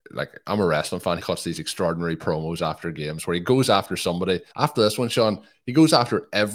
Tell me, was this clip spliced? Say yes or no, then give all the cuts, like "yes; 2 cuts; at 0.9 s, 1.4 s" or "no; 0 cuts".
yes; 2 cuts; at 1.2 s, 4.5 s